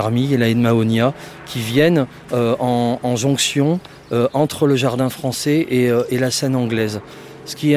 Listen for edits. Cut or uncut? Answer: uncut